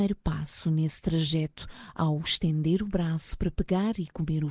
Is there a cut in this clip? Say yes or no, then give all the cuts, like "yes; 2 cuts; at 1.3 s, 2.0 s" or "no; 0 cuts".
no; 0 cuts